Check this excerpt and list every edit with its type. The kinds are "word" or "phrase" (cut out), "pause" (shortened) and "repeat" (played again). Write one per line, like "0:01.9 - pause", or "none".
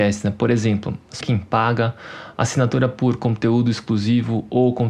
0:01.2 - word